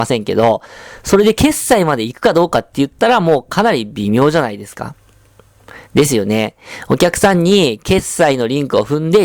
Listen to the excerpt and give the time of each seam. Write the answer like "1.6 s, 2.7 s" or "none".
5.8 s